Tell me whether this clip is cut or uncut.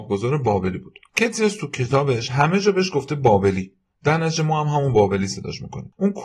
uncut